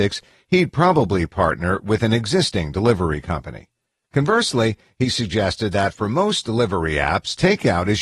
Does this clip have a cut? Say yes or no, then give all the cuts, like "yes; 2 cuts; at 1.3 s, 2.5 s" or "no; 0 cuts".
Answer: no; 0 cuts